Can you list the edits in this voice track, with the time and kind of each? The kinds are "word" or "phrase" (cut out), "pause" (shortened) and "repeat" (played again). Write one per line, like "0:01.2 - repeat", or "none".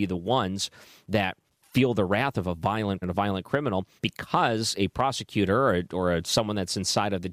0:01.5 - pause
0:03.0 - word
0:04.0 - pause